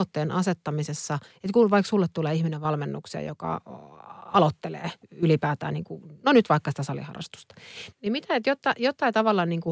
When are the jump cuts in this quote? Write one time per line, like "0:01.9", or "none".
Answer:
0:05.0
0:07.9